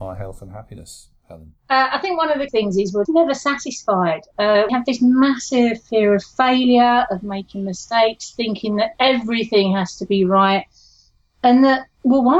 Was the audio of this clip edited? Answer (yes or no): yes